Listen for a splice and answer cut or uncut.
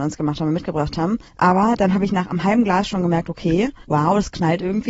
cut